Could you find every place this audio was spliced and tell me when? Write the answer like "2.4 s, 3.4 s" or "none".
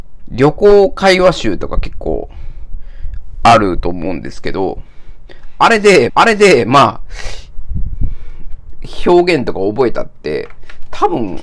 6.1 s